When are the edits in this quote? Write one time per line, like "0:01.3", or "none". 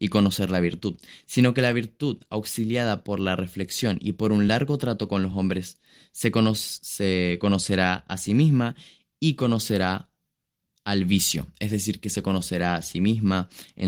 none